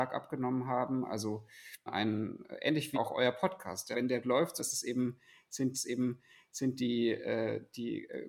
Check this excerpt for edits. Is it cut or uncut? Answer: cut